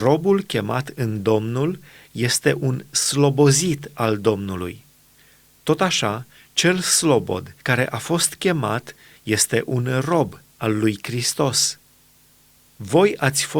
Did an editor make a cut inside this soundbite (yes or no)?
yes